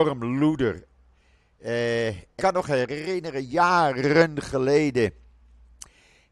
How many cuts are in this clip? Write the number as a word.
one